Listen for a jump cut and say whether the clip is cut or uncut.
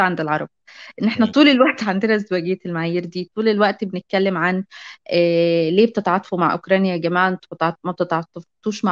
uncut